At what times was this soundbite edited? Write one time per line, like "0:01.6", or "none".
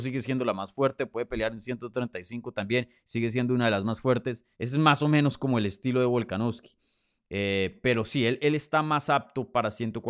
0:04.5